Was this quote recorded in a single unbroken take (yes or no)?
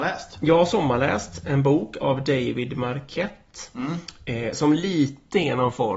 yes